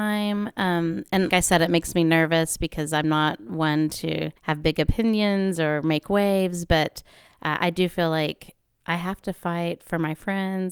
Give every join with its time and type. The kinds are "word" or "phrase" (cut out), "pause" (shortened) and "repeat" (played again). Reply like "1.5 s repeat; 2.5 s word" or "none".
1.3 s word; 4.4 s pause